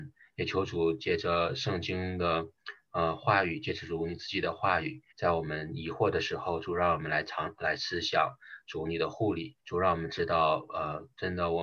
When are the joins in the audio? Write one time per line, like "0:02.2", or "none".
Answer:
0:05.1
0:09.6